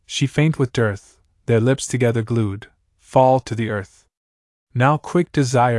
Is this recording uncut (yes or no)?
yes